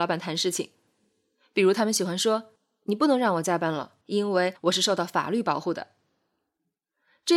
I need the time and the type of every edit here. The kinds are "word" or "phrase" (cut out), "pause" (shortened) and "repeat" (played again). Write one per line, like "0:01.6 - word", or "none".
0:02.6 - pause
0:04.0 - pause
0:04.6 - pause